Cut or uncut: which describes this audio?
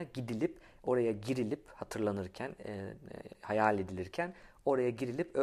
uncut